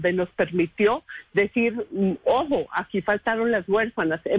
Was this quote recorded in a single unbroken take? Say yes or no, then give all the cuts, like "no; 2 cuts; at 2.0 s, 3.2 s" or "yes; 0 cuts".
yes; 0 cuts